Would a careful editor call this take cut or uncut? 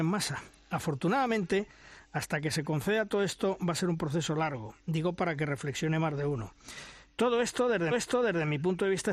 cut